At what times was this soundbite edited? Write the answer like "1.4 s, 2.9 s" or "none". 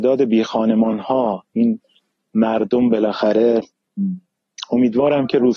none